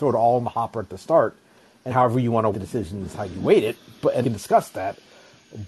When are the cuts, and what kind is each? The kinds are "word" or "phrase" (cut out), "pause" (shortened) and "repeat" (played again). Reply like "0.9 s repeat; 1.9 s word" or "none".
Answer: 1.9 s word; 2.5 s word; 4.2 s word